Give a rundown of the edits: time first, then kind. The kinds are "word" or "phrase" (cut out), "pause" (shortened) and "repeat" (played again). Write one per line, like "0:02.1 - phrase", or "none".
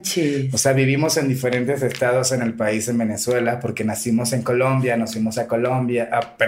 none